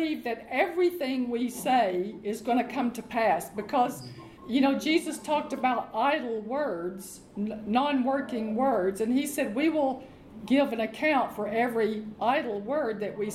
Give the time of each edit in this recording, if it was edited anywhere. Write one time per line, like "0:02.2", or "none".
0:04.4